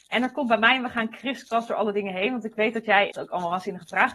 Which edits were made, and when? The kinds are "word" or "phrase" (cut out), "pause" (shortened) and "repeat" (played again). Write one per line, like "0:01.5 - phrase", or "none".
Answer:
0:03.1 - word